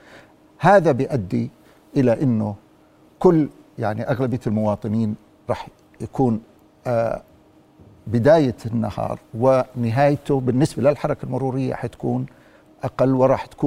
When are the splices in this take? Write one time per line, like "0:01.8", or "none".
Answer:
none